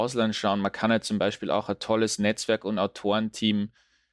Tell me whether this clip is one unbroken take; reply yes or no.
yes